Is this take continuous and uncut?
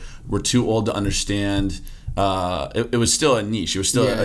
yes; 0 cuts

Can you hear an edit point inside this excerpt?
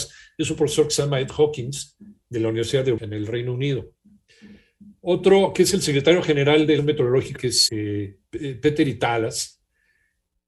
yes; 4 cuts; at 3.0 s, 6.8 s, 7.4 s, 7.7 s

